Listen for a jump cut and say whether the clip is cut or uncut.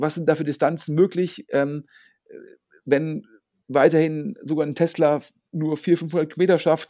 uncut